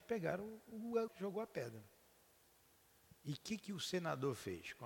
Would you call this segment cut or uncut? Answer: cut